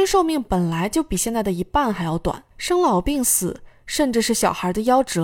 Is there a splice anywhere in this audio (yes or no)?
yes